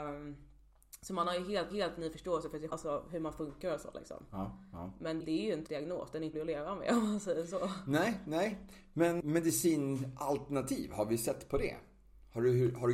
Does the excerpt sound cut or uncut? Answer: cut